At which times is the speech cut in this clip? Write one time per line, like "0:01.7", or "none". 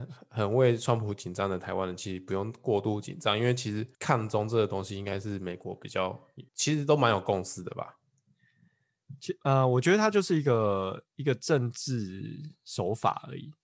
0:03.9
0:06.5